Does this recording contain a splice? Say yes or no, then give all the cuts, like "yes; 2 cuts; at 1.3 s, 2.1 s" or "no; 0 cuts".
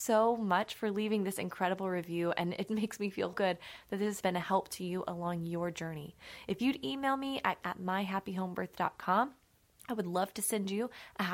yes; 4 cuts; at 2.7 s, 3.3 s, 4.2 s, 7.6 s